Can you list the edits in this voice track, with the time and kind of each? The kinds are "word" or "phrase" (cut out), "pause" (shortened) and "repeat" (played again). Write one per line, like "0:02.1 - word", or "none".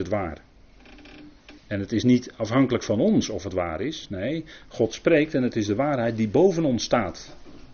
0:01.6 - pause